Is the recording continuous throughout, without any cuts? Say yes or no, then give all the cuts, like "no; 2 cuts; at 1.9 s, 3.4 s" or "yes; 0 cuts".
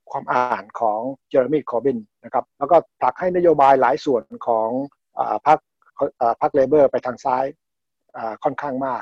no; 3 cuts; at 1.2 s, 2.5 s, 5.0 s